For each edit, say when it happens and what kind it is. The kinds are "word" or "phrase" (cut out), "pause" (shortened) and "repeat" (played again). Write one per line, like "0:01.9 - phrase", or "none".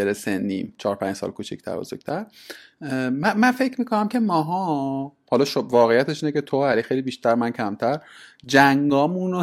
none